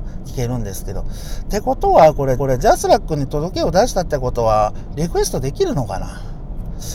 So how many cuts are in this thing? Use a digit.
1